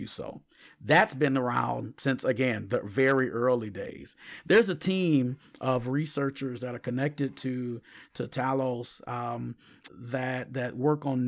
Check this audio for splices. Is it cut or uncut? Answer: cut